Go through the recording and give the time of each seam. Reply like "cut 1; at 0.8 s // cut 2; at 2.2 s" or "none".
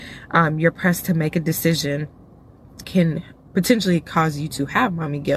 cut 1; at 2.8 s